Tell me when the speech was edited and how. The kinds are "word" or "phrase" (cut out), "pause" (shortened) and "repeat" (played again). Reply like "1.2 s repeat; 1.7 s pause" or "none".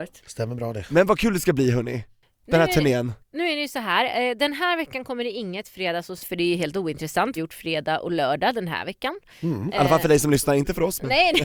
3.2 s pause; 6.2 s word; 7.4 s phrase